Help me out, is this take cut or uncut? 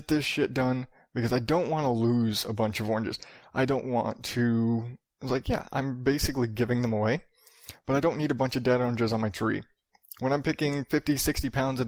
uncut